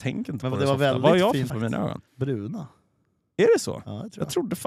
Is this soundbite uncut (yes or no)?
no